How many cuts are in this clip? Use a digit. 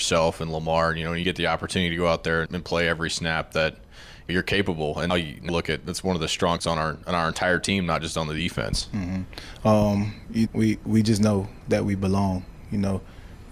7